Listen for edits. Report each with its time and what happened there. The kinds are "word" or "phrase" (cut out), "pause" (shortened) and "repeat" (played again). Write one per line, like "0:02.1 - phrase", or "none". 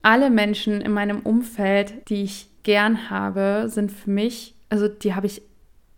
0:02.0 - pause
0:02.6 - pause